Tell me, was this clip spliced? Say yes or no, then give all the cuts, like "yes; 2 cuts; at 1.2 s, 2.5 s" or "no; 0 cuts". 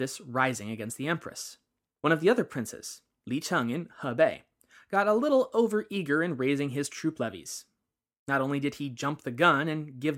no; 0 cuts